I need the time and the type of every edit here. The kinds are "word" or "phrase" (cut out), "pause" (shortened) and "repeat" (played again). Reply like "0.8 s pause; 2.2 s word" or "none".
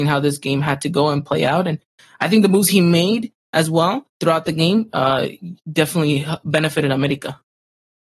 4.1 s pause